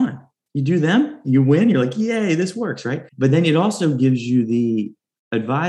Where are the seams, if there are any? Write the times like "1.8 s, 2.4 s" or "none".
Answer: 3.1 s